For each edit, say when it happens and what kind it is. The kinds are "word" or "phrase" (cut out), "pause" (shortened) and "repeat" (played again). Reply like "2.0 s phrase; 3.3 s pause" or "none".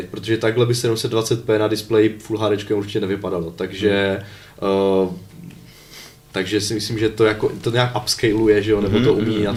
none